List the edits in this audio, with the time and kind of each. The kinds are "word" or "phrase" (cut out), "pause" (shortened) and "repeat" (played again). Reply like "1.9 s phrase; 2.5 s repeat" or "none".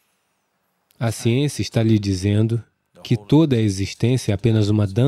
none